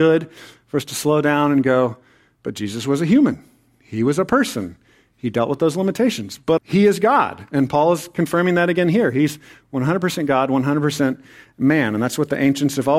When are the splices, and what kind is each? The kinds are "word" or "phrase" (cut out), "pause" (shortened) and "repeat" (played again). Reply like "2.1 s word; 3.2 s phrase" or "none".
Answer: 6.6 s word